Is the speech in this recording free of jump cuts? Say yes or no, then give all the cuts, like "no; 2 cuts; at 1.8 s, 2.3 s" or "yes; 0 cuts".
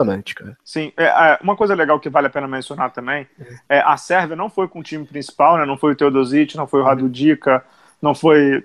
yes; 0 cuts